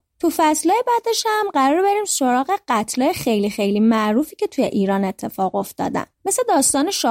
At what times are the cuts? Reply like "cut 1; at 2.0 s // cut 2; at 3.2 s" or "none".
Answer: cut 1; at 6.1 s